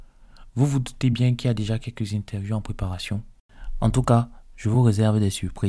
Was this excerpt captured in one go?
yes; 0 cuts

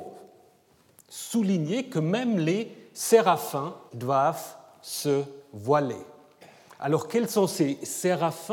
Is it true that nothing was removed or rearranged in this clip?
no; 1 cut; at 3.9 s

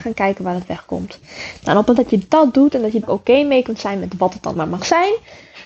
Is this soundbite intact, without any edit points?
no; 3 cuts; at 2.0 s, 3.0 s, 4.5 s

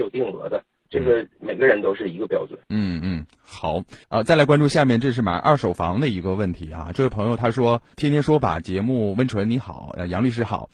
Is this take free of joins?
no; 2 cuts; at 2.6 s, 4.0 s

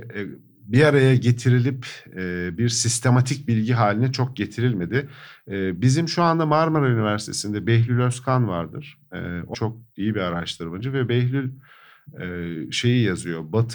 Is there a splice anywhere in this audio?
yes; 1 cut; at 9.5 s

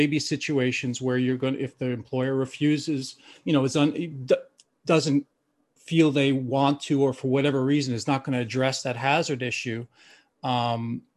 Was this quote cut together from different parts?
no; 0 cuts

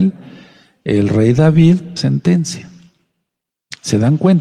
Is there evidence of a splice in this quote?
yes; 1 cut; at 2.0 s

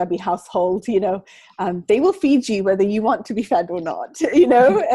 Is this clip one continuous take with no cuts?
yes; 0 cuts

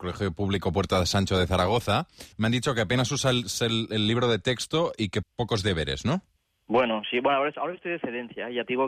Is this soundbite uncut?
no; 3 cuts; at 2.3 s, 5.2 s, 6.4 s

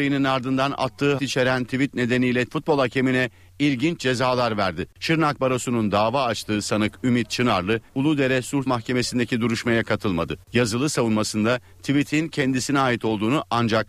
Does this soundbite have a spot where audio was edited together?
yes; 6 cuts; at 1.2 s, 2.5 s, 4.9 s, 7.9 s, 8.7 s, 10.4 s

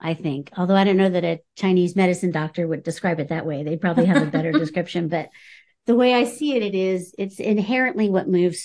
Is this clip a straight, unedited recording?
yes; 0 cuts

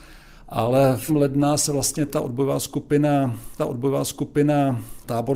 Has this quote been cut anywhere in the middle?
yes; 3 cuts; at 1.1 s, 2.1 s, 3.6 s

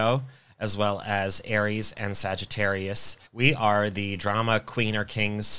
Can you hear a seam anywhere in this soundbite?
yes; 1 cut; at 3.3 s

